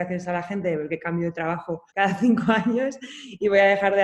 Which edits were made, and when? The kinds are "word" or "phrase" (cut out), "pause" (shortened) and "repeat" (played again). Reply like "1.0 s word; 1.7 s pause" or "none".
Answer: 1.9 s pause